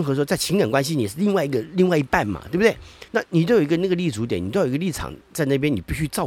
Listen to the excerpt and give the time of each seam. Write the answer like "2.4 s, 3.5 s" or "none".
3.1 s, 5.2 s